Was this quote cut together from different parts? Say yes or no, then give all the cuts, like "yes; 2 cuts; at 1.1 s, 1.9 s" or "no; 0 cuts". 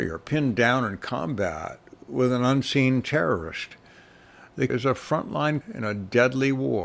yes; 2 cuts; at 4.7 s, 5.6 s